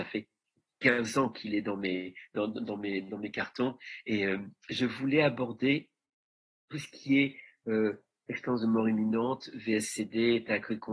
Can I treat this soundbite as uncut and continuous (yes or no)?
yes